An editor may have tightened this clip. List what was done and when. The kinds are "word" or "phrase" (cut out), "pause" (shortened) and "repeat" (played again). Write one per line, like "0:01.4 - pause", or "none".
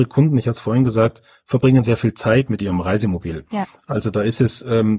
none

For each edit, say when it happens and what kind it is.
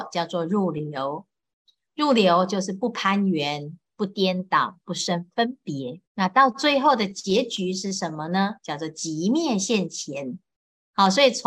0:06.1 - pause

